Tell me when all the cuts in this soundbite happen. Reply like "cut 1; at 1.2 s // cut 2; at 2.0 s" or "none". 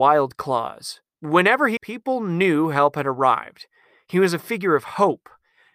cut 1; at 1.1 s // cut 2; at 1.8 s